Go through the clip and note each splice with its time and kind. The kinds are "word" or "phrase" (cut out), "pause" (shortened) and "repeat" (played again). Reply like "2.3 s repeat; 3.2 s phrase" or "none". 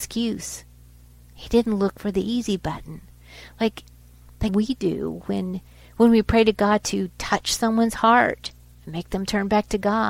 4.5 s word